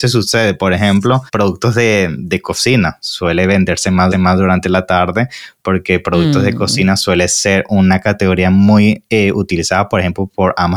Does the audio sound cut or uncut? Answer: cut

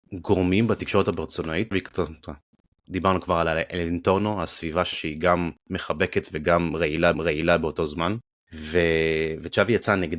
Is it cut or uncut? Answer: cut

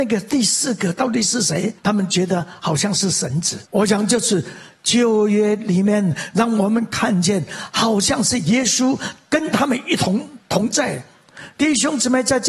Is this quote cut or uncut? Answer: cut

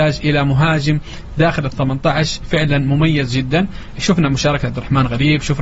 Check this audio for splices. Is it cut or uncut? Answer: uncut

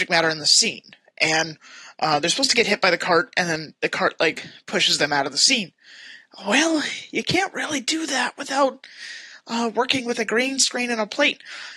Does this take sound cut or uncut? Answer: uncut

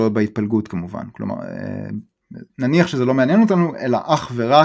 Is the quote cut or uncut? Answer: cut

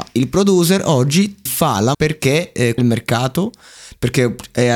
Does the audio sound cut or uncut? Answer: cut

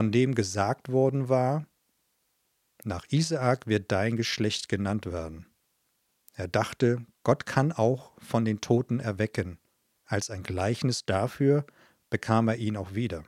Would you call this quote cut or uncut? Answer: uncut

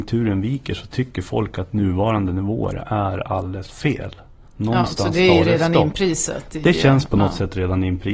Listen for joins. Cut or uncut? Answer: uncut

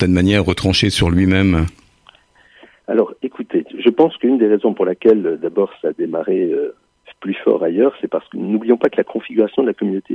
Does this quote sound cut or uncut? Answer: cut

